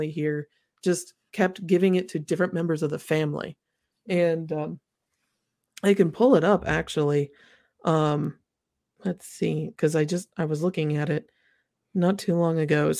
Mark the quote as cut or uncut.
uncut